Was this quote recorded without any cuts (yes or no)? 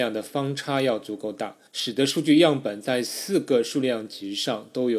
no